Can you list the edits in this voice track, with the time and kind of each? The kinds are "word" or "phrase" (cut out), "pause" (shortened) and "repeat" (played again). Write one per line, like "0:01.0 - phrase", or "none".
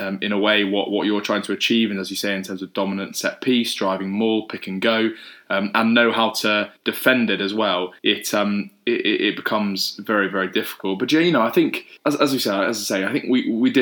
0:06.8 - pause
0:08.0 - pause
0:12.0 - pause